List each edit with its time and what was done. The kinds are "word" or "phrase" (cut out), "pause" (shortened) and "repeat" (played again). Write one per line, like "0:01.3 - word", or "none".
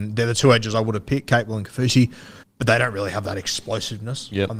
0:02.4 - pause